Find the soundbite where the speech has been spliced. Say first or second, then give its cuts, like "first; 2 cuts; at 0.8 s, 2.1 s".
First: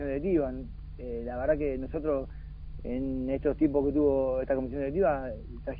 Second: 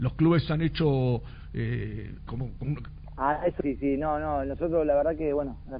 second; 3 cuts; at 2.3 s, 2.6 s, 3.6 s